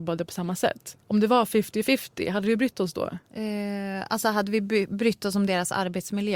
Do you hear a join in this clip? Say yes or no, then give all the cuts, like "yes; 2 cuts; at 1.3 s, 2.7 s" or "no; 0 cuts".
yes; 2 cuts; at 1.0 s, 3.3 s